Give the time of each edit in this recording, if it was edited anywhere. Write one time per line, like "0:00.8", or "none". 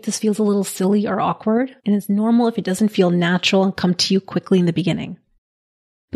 0:01.8